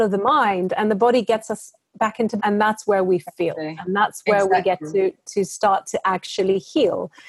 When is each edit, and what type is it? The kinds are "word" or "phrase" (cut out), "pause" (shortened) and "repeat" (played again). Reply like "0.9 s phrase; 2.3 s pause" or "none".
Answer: 2.4 s word